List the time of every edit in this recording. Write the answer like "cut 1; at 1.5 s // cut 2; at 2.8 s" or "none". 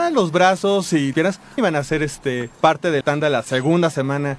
cut 1; at 1.1 s // cut 2; at 1.6 s // cut 3; at 2.5 s // cut 4; at 3.0 s